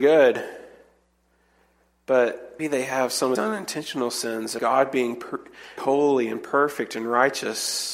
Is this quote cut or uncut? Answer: cut